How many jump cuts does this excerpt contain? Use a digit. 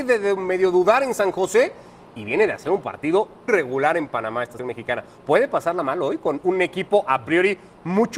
2